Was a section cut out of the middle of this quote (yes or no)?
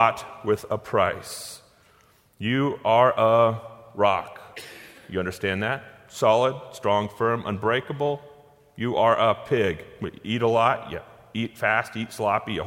no